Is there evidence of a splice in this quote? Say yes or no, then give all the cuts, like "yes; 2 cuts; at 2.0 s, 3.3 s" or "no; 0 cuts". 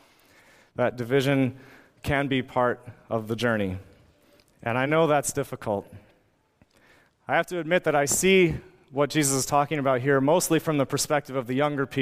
no; 0 cuts